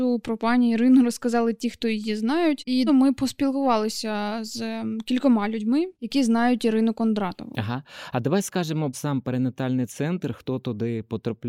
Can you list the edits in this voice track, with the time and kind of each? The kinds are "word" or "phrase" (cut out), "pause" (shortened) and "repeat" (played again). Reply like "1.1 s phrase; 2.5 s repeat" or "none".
2.9 s phrase; 5.9 s pause; 8.9 s word